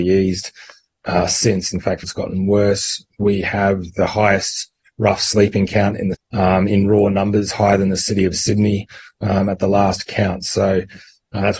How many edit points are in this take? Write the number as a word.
two